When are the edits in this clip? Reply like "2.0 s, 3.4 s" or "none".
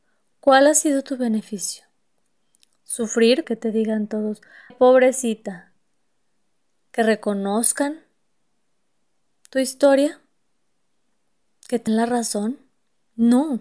3.4 s, 4.7 s, 11.9 s